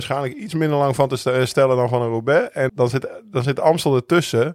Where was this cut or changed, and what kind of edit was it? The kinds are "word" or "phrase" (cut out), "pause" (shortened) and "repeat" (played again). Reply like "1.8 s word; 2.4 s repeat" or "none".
2.7 s word